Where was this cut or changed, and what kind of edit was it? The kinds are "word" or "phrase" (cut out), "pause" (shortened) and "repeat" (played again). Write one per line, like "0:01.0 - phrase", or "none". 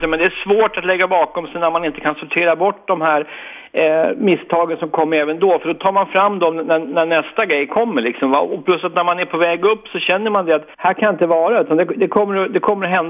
0:10.7 - pause